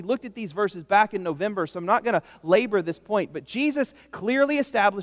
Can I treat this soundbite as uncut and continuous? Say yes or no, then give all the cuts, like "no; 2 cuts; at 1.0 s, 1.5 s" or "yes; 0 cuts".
yes; 0 cuts